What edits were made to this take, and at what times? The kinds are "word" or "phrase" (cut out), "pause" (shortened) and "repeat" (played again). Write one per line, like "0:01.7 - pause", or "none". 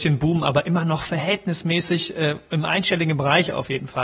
none